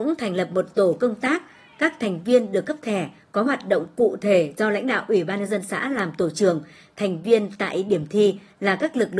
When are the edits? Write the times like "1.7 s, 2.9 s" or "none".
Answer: none